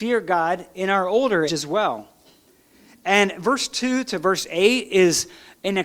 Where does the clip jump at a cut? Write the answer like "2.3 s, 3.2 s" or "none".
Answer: 1.5 s